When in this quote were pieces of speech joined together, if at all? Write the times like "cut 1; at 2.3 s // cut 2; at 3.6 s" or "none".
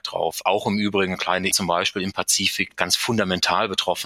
cut 1; at 1.5 s // cut 2; at 2.7 s

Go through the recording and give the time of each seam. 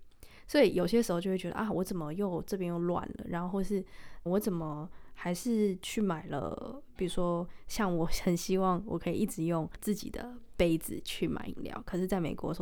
cut 1; at 4.3 s

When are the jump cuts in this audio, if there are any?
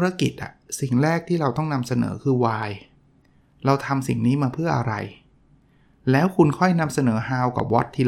none

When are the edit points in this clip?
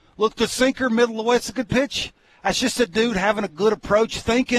none

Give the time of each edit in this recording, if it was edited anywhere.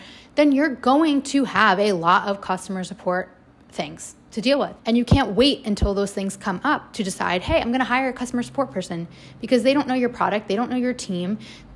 cut 1; at 4.8 s

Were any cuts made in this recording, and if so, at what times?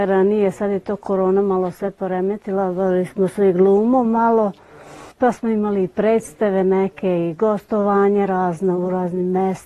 cut 1; at 5.1 s

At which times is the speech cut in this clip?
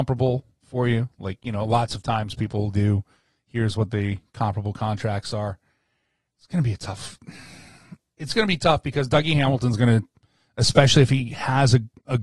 none

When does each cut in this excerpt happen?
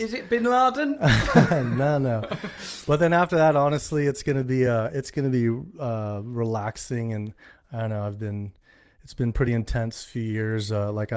none

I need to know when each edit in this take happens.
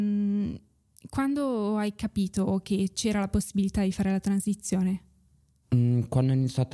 none

